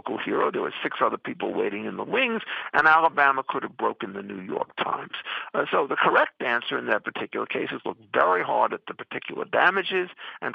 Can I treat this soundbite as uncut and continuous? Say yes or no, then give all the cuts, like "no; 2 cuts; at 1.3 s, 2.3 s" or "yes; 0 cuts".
yes; 0 cuts